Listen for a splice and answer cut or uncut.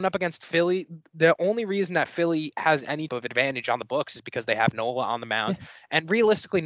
cut